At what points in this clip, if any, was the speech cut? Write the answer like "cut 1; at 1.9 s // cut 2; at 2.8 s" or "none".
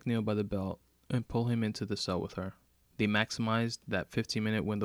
cut 1; at 2.8 s